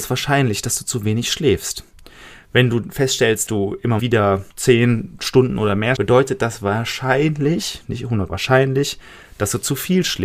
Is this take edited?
yes; 5 cuts; at 3.5 s, 4.0 s, 4.5 s, 6.0 s, 8.3 s

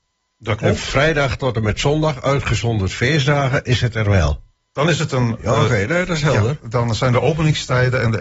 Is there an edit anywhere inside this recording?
no; 0 cuts

